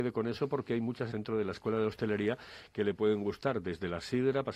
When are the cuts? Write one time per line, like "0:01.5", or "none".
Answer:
0:01.1